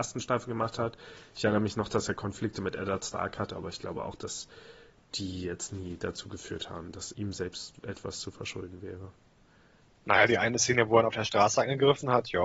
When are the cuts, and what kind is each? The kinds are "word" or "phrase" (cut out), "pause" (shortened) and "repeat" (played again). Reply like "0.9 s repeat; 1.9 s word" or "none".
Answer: 7.1 s word; 9.8 s pause